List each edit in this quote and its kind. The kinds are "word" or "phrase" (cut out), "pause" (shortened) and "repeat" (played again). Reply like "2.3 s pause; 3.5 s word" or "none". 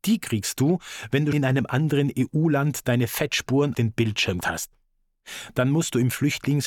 1.3 s word; 3.7 s word; 4.4 s word